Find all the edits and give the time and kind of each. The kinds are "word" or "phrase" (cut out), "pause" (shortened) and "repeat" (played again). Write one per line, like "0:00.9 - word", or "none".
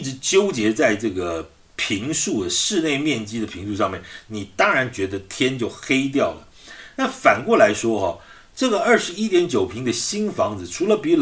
none